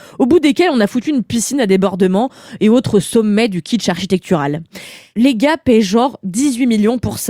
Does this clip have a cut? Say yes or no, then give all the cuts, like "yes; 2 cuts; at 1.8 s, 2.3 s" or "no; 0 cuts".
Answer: no; 0 cuts